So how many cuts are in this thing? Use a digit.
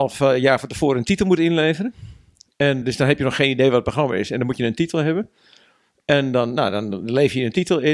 1